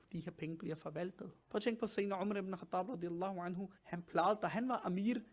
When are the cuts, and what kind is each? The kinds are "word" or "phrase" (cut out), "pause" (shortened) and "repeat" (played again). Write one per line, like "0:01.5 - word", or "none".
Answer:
0:01.4 - pause
0:03.8 - pause